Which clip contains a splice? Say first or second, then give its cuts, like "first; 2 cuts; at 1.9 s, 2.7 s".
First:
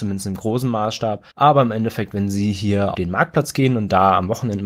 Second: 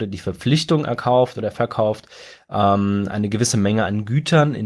first; 2 cuts; at 1.3 s, 2.9 s